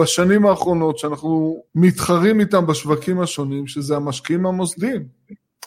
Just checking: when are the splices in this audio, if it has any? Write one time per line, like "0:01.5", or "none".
0:01.7